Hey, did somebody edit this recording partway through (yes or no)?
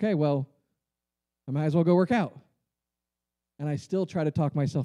no